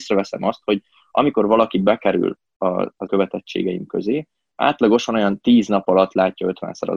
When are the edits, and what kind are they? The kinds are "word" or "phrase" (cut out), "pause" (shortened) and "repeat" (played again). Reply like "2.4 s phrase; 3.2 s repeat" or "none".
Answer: 3.1 s word